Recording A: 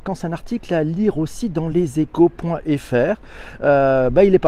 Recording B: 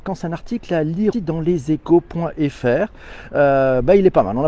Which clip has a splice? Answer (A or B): B